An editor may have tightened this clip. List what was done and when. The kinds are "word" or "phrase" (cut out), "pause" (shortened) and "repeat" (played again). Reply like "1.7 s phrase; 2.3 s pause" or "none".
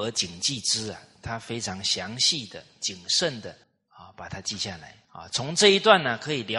3.6 s pause; 5.0 s pause